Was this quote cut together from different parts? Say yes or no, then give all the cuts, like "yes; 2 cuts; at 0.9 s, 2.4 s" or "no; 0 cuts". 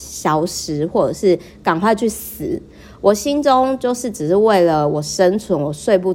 no; 0 cuts